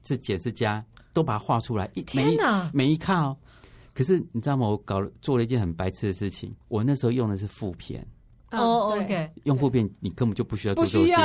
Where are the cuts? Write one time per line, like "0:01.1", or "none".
0:06.6